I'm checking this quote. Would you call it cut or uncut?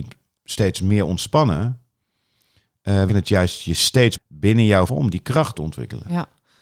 cut